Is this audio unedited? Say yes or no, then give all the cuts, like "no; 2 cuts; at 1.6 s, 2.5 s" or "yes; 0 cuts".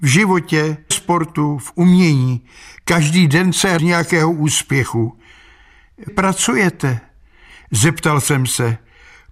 no; 3 cuts; at 0.9 s, 3.8 s, 6.1 s